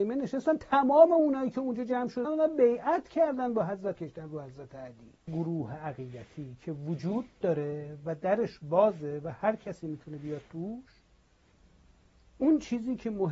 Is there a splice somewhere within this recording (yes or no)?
yes